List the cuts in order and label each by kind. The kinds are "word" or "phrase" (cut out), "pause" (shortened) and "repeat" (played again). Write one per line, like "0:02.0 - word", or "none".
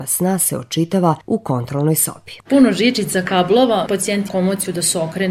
0:01.2 - pause
0:02.4 - pause
0:03.9 - word
0:04.3 - word